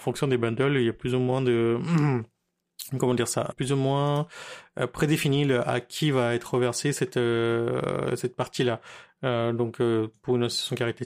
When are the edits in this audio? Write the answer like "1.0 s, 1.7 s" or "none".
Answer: 3.5 s